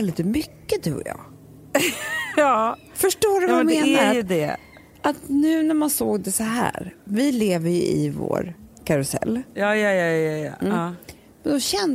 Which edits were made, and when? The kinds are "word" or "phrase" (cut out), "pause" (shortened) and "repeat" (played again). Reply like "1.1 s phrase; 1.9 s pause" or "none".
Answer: none